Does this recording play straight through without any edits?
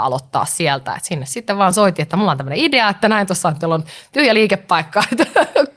yes; 0 cuts

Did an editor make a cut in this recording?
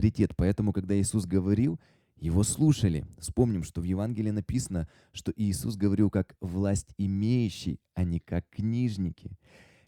no; 0 cuts

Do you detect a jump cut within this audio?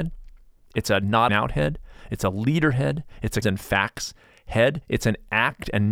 yes; 3 cuts; at 1.3 s, 2.0 s, 3.4 s

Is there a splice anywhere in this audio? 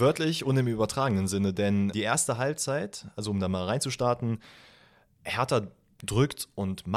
yes; 1 cut; at 1.9 s

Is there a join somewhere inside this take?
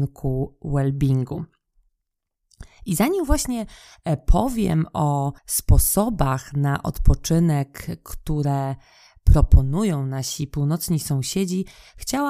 yes; 1 cut; at 5.4 s

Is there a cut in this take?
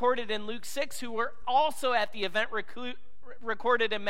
no; 0 cuts

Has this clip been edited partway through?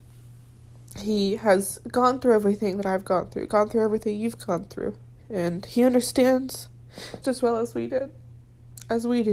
yes; 1 cut; at 7.2 s

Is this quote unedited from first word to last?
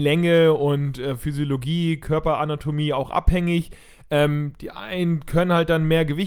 yes; 0 cuts

